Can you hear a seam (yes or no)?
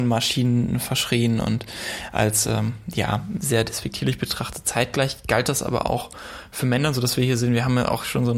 no